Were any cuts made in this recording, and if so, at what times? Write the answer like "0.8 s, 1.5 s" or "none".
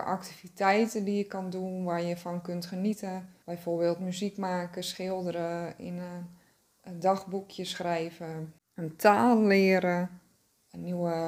3.4 s, 8.6 s